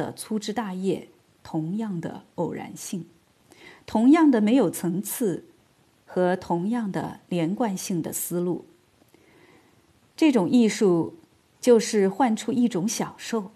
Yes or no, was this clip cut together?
no